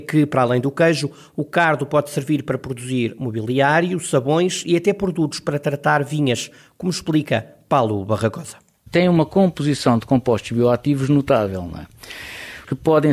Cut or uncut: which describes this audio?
uncut